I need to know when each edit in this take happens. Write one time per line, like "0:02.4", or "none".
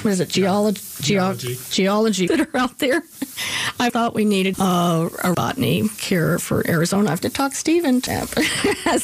0:02.3
0:03.9
0:04.5
0:05.3
0:06.0
0:07.2
0:08.1